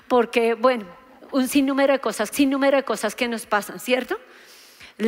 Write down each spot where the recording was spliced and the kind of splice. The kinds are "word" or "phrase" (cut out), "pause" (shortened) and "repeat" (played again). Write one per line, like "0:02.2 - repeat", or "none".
0:02.3 - repeat